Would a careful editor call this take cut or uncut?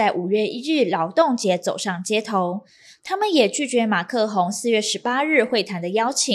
uncut